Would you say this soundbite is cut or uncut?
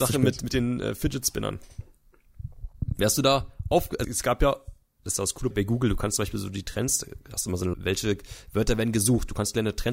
cut